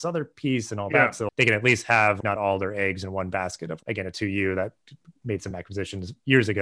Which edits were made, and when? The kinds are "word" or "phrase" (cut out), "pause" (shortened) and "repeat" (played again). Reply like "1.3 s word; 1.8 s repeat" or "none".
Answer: none